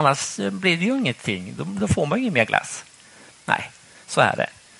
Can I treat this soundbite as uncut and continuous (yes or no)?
yes